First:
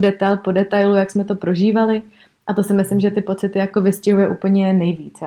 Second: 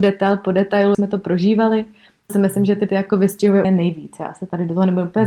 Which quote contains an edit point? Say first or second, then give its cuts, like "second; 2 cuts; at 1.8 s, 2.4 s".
second; 4 cuts; at 0.9 s, 2.3 s, 2.9 s, 3.6 s